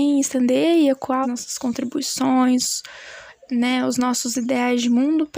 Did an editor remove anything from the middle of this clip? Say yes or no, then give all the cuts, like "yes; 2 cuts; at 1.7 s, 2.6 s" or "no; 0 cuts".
yes; 1 cut; at 1.2 s